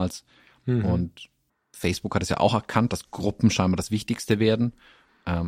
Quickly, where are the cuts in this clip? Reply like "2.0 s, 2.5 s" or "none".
1.5 s

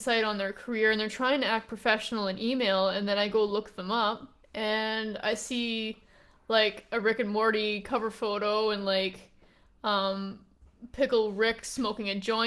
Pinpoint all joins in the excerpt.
4.4 s

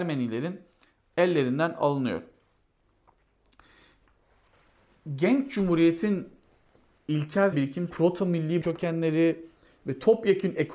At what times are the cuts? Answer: 7.5 s, 7.9 s, 8.6 s

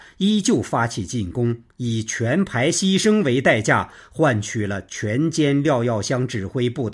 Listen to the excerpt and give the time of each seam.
1.7 s

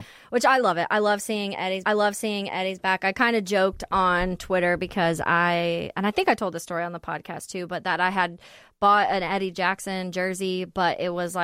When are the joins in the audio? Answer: 1.9 s

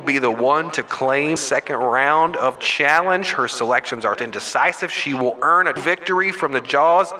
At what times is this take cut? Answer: 1.4 s, 2.5 s, 4.1 s, 5.8 s

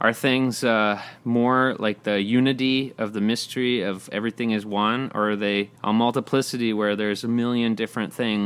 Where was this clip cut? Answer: 5.8 s

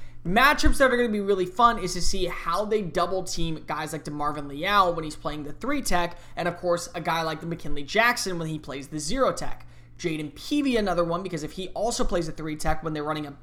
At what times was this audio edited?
none

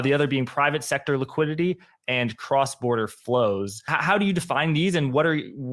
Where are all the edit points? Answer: none

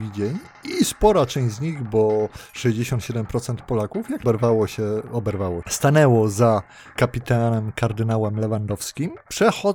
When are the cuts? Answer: 4.2 s, 5.6 s

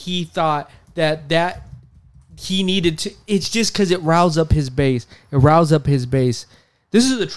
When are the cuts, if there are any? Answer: none

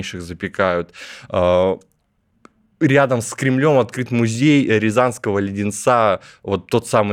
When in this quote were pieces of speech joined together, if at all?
none

